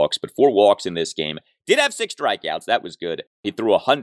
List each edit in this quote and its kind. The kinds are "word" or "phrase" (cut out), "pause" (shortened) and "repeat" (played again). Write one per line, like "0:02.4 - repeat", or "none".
none